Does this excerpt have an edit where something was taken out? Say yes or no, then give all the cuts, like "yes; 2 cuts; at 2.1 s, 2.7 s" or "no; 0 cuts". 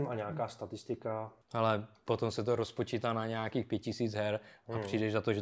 yes; 1 cut; at 1.4 s